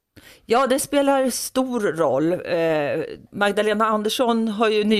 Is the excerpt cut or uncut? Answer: cut